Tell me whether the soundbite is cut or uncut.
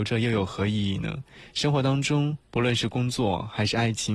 cut